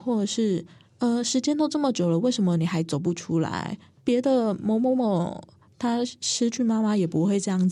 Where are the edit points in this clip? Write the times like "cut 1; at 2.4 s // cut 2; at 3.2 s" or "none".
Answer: none